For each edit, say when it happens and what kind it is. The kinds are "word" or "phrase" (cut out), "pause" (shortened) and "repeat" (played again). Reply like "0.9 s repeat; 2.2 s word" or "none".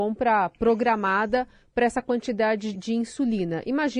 2.7 s word